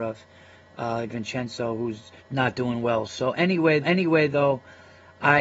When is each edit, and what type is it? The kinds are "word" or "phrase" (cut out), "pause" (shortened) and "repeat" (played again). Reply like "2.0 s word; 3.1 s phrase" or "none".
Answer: 1.1 s word; 2.2 s pause; 3.8 s repeat